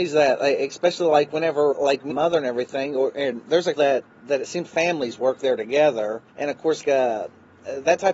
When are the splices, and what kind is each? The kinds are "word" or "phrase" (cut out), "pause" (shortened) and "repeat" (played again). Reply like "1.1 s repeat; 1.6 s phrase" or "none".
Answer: 1.7 s word; 2.1 s phrase; 3.8 s phrase; 4.7 s word; 6.3 s pause; 6.8 s word